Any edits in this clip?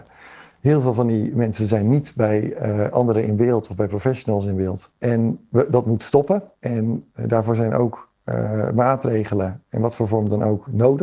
no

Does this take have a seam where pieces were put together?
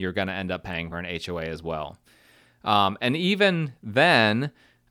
no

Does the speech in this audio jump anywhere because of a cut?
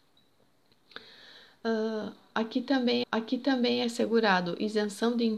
yes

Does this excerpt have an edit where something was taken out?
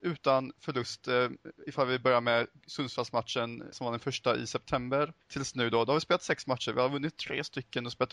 yes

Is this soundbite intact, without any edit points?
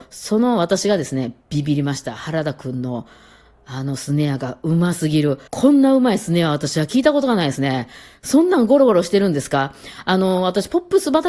no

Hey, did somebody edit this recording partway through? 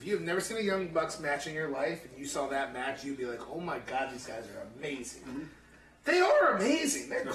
no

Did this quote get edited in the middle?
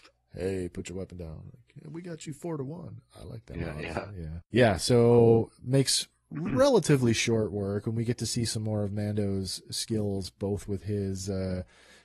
yes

